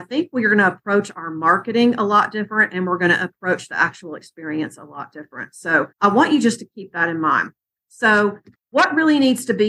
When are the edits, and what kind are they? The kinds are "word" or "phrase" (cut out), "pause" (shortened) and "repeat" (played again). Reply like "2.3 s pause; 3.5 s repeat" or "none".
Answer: 5.9 s pause